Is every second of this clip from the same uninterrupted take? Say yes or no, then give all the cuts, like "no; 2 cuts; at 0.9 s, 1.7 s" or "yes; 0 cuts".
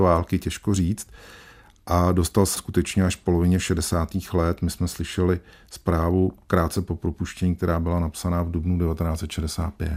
no; 1 cut; at 2.6 s